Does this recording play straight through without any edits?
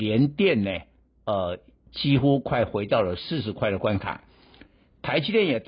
yes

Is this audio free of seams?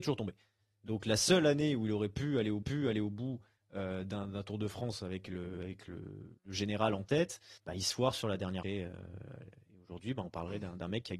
no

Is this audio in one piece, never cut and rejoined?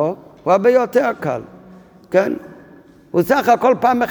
yes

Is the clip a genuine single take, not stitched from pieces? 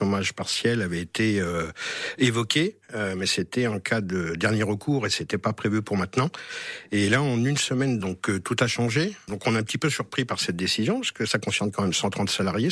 yes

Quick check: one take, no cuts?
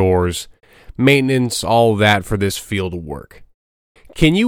yes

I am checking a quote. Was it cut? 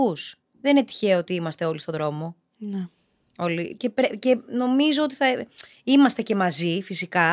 no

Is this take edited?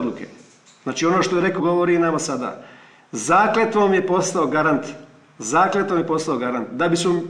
yes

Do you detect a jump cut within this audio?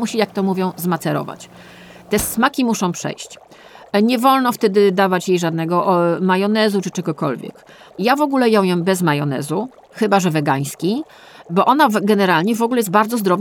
no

